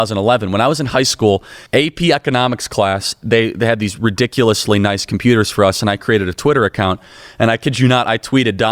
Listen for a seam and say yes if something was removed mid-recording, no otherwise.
yes